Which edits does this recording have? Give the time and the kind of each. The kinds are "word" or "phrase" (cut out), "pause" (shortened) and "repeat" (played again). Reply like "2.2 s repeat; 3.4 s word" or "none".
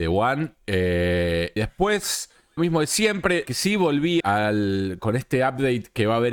1.6 s word; 2.6 s word; 3.4 s word; 4.2 s word